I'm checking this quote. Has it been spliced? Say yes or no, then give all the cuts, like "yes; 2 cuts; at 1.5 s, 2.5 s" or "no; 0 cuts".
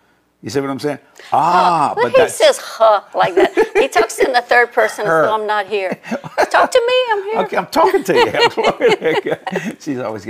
no; 0 cuts